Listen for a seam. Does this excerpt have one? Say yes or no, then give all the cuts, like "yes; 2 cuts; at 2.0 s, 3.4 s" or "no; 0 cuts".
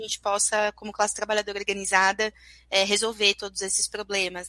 no; 0 cuts